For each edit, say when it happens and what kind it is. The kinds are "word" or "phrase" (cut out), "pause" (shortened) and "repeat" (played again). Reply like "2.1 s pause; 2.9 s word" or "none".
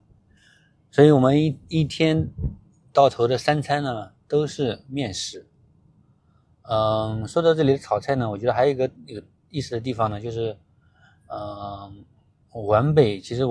none